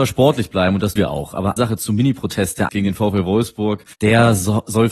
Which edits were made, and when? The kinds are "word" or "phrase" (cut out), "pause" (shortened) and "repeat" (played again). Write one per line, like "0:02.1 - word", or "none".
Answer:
0:01.0 - word
0:01.6 - word
0:02.7 - word
0:03.9 - pause